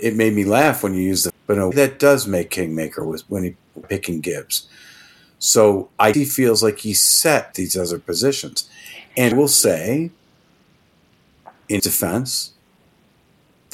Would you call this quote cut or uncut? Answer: cut